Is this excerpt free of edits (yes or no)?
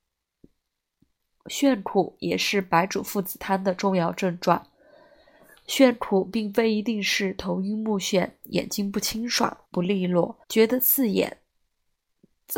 no